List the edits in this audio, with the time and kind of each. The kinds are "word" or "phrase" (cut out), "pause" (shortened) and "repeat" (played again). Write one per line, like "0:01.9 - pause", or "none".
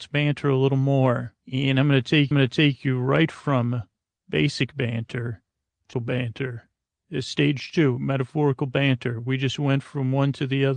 0:01.4 - pause
0:02.3 - repeat
0:05.9 - word